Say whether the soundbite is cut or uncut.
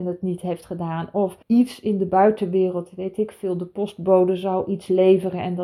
cut